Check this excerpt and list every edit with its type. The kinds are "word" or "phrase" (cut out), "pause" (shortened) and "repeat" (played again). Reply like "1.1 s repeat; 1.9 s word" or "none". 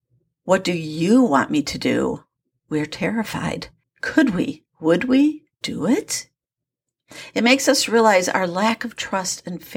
2.4 s pause; 3.8 s pause; 4.7 s pause; 5.5 s pause